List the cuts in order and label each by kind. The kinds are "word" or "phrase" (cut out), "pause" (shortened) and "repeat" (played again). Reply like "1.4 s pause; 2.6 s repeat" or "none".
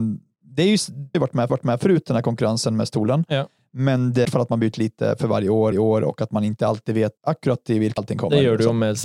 1.1 s phrase; 1.5 s repeat; 4.2 s phrase; 4.7 s word; 5.7 s repeat; 7.2 s pause; 8.0 s word